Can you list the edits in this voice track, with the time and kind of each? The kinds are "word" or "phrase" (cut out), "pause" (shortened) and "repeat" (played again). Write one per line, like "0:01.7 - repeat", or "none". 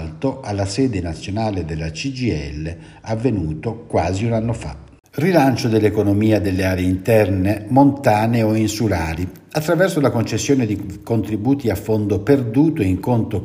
0:05.0 - pause